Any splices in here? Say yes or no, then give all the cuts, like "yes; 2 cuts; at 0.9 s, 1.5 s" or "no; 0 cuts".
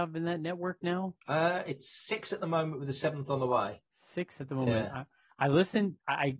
yes; 2 cuts; at 1.2 s, 3.9 s